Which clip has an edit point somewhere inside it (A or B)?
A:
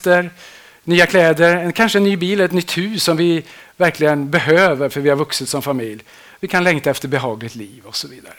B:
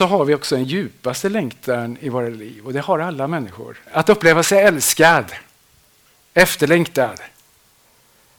B